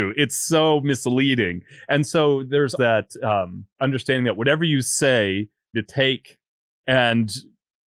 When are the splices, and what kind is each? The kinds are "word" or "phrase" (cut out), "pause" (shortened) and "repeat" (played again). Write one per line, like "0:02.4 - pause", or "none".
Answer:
0:02.8 - word
0:03.7 - pause
0:05.7 - phrase